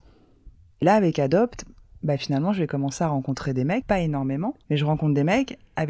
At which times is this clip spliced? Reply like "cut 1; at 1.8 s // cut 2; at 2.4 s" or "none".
cut 1; at 3.8 s // cut 2; at 4.6 s